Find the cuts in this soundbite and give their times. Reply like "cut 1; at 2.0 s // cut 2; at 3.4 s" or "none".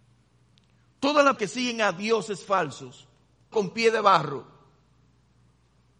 cut 1; at 1.4 s // cut 2; at 3.5 s